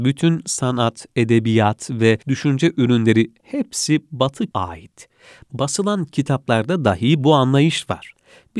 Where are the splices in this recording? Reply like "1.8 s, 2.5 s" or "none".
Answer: 2.2 s, 4.5 s